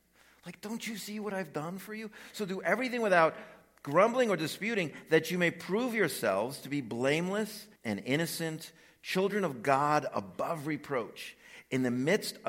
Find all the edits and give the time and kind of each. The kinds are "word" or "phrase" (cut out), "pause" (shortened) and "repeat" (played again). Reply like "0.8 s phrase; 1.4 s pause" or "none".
7.8 s pause